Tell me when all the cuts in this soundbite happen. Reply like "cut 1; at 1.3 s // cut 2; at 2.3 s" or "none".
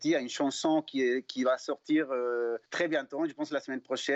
cut 1; at 2.7 s